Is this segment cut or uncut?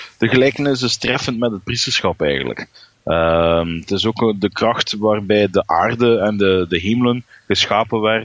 uncut